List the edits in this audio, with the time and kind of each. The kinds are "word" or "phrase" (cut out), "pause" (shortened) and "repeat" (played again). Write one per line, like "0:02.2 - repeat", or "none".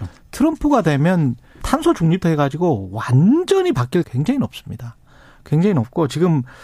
0:01.6 - word
0:02.2 - word
0:04.0 - word